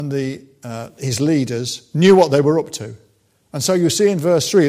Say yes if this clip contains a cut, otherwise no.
no